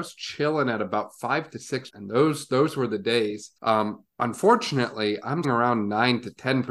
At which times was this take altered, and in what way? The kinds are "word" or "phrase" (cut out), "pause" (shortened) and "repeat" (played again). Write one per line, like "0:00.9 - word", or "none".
0:01.9 - phrase
0:03.6 - pause
0:05.4 - word